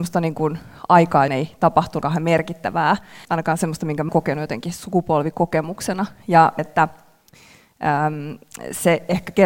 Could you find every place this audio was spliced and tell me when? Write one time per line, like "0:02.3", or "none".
0:01.3
0:02.0
0:03.2
0:04.1
0:06.6